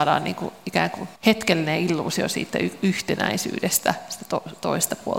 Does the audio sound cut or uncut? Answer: cut